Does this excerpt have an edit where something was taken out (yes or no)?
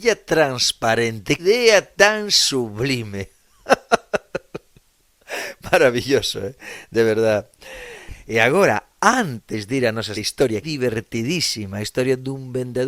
yes